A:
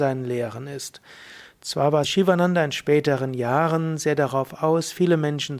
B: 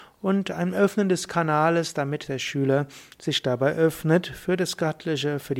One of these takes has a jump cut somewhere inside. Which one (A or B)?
A